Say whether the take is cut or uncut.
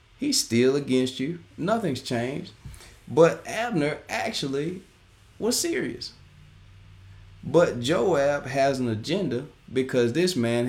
cut